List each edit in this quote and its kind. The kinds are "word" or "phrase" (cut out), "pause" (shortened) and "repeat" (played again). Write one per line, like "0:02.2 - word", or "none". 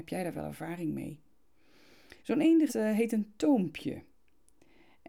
0:02.2 - pause
0:02.7 - phrase